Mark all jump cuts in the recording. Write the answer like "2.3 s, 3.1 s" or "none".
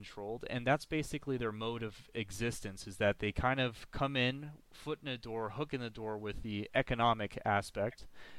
none